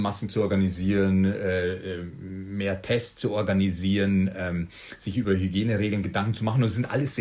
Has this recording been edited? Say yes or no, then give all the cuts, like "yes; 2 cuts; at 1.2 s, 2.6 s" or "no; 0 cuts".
no; 0 cuts